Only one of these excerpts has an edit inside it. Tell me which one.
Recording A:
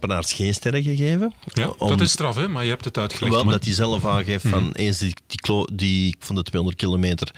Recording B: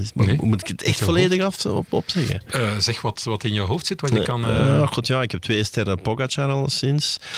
A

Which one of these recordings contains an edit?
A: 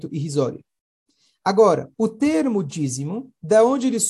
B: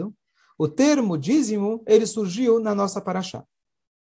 A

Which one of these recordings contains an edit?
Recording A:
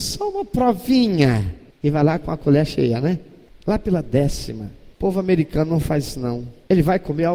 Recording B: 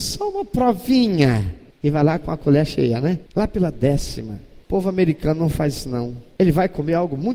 B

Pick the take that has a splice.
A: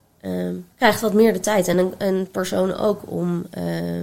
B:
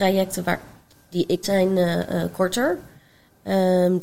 B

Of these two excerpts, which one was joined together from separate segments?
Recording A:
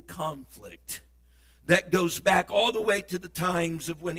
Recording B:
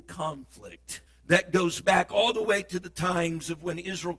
B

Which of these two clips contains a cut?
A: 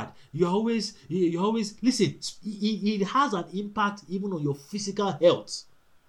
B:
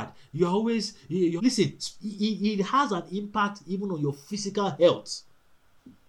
B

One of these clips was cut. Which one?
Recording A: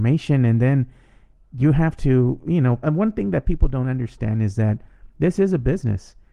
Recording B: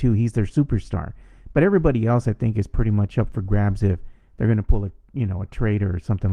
A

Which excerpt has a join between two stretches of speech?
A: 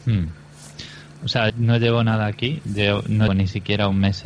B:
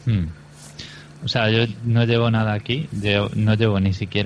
A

